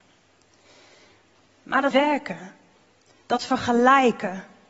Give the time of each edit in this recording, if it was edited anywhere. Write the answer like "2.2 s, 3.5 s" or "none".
1.9 s